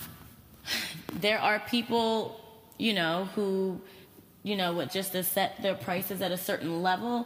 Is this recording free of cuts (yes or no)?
no